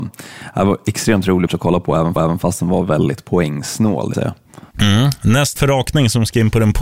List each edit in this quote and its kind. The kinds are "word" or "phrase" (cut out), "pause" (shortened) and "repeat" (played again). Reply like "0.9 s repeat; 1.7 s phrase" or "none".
1.5 s word; 2.2 s repeat; 4.1 s word; 4.7 s pause; 5.6 s word